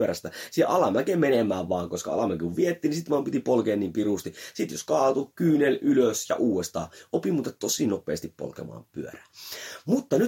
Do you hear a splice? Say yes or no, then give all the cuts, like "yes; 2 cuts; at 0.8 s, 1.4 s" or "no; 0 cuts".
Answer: no; 0 cuts